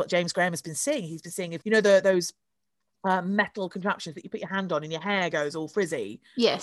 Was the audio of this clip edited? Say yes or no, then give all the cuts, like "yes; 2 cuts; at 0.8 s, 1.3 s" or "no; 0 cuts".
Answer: yes; 1 cut; at 1.6 s